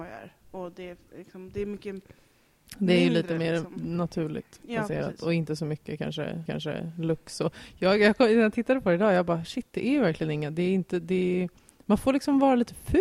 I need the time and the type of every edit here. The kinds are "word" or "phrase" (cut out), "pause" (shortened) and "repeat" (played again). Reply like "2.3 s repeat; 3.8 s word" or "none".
6.5 s repeat